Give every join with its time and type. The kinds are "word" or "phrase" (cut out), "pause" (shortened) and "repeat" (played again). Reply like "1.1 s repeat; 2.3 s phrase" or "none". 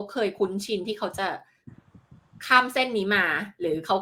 none